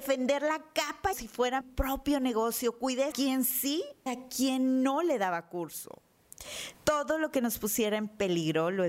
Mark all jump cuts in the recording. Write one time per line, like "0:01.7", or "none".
0:01.1
0:01.6
0:03.1
0:04.1
0:06.7